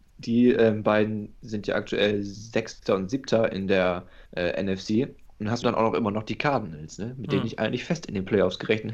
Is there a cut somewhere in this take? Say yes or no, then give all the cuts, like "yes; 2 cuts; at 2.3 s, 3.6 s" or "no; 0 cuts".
yes; 2 cuts; at 4.3 s, 5.6 s